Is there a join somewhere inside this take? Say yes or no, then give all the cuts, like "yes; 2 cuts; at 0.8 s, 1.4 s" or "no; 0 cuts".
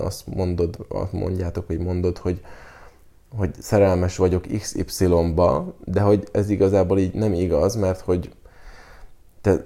no; 0 cuts